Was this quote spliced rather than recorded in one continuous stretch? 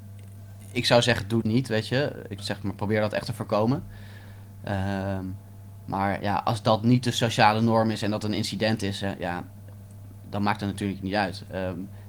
yes; 2 cuts; at 1.4 s, 2.4 s

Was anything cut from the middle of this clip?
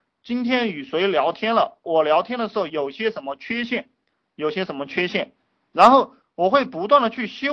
no; 0 cuts

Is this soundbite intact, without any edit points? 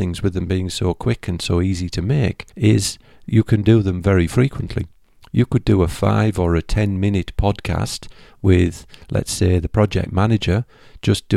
no; 1 cut; at 2.5 s

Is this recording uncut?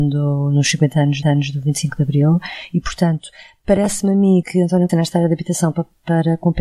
no; 3 cuts; at 1.2 s, 4.4 s, 4.9 s

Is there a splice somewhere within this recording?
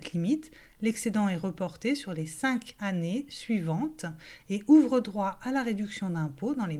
no; 0 cuts

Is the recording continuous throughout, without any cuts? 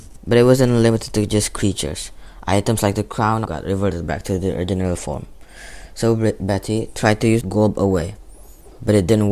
no; 2 cuts; at 3.4 s, 7.4 s

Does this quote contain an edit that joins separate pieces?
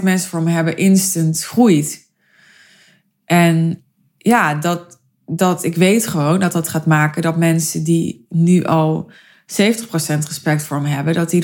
no; 0 cuts

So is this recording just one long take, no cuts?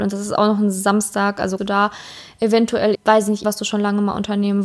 no; 3 cuts; at 1.6 s, 2.9 s, 3.4 s

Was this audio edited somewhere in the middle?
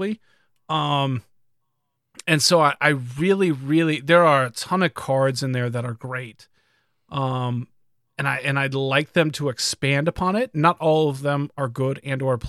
no; 0 cuts

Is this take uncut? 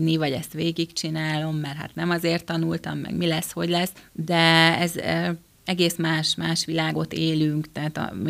yes; 0 cuts

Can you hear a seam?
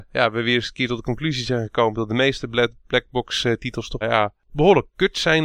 yes; 1 cut; at 4.0 s

